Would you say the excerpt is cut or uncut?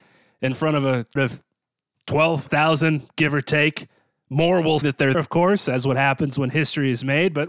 cut